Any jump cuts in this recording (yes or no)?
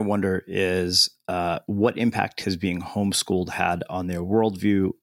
no